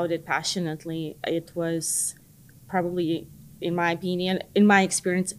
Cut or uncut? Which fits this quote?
uncut